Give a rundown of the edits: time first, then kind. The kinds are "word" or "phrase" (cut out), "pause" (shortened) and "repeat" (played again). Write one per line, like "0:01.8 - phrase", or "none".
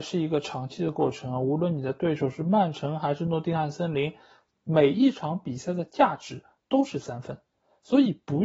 none